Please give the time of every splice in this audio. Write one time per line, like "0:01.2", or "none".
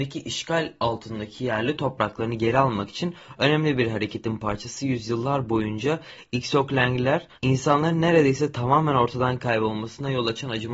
0:07.3